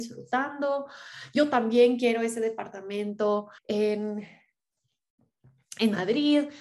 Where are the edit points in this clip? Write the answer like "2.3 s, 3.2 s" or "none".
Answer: 3.6 s